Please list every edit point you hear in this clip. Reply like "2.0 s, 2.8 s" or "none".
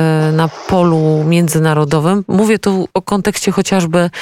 2.9 s